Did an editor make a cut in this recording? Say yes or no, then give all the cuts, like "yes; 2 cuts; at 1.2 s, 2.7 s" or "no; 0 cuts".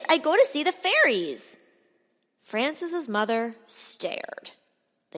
no; 0 cuts